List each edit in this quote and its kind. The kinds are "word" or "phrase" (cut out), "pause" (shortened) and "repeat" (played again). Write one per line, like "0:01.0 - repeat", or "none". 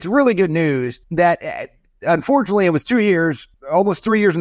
0:01.0 - pause